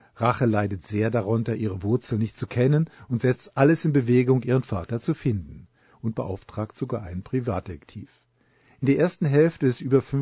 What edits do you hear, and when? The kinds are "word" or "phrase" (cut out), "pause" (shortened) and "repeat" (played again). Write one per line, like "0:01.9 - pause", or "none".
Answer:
none

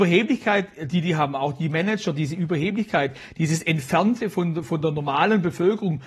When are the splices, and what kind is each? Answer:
none

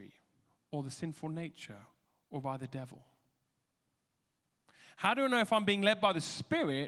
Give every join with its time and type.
none

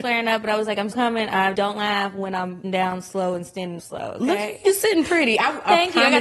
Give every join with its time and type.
0:00.9 - word
0:01.5 - word
0:02.6 - word
0:03.8 - word

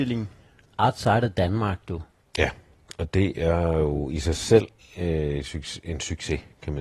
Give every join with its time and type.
0:04.8 - pause

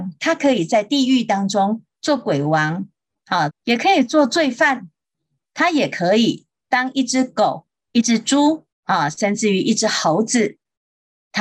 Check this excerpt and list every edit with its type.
0:03.5 - phrase
0:08.7 - pause

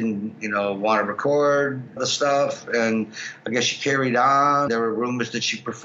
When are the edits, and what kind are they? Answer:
0:02.0 - word
0:04.7 - word

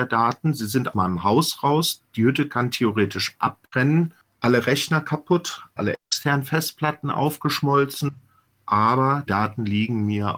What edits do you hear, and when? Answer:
0:00.9 - word
0:05.8 - word
0:09.3 - word

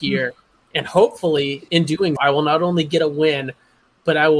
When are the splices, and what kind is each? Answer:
0:02.2 - word

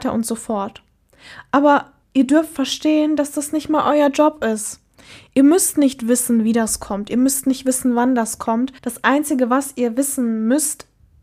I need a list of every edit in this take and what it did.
0:02.0 - pause
0:08.8 - pause

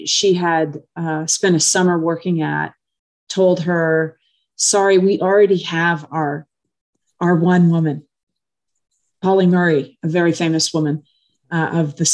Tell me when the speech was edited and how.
none

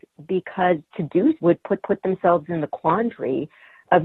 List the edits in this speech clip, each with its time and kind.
0:01.4 - word
0:01.8 - repeat

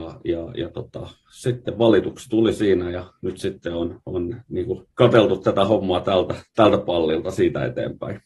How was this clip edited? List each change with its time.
0:04.9 - pause

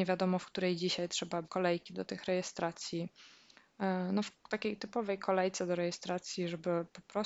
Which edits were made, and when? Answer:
0:01.4 - word

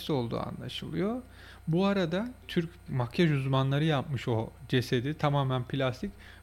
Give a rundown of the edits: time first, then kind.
0:02.9 - word

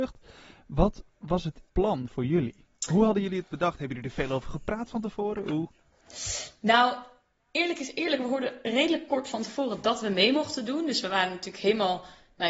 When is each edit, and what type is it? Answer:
0:01.7 - pause

